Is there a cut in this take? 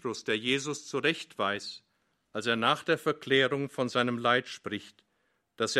no; 0 cuts

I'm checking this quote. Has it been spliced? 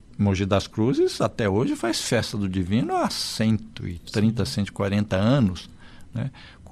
no; 0 cuts

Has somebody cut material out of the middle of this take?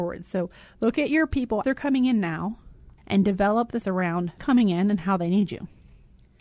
yes; 4 cuts; at 1.6 s, 3.0 s, 3.8 s, 4.4 s

